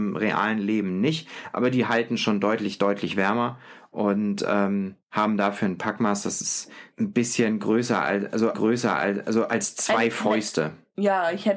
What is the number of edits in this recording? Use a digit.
3